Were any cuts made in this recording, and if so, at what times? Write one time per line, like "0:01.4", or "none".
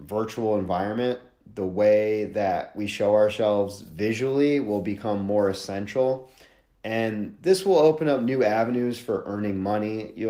none